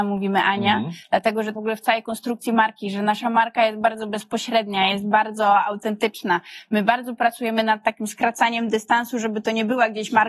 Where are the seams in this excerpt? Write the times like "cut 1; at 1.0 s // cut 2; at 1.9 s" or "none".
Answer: cut 1; at 1.6 s